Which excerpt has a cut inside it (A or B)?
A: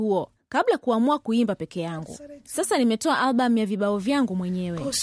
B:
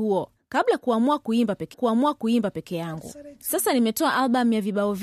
B